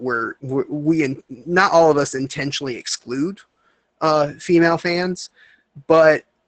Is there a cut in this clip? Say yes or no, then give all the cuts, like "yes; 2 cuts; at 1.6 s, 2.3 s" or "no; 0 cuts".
no; 0 cuts